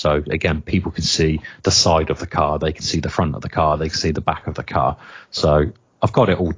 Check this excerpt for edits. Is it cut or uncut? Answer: uncut